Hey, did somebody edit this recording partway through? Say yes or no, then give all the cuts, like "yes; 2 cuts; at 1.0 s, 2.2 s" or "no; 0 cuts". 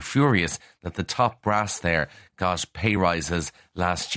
no; 0 cuts